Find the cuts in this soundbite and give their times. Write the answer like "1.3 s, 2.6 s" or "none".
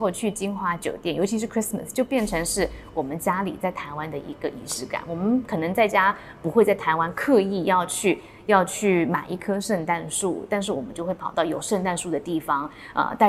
none